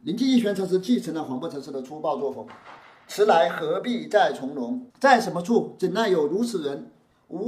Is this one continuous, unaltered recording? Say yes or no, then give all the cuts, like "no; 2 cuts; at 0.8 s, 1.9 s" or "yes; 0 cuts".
no; 1 cut; at 4.9 s